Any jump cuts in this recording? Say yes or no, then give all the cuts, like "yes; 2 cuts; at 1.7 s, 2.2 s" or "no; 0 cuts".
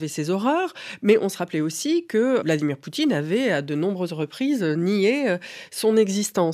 yes; 1 cut; at 2.4 s